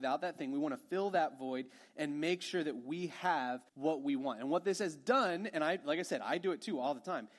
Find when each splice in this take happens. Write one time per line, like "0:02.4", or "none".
0:03.7